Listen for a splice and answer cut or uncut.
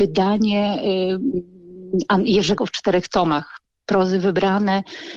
cut